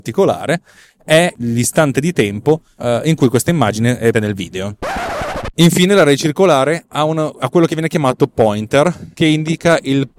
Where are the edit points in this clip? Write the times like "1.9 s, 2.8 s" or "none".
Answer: 4.1 s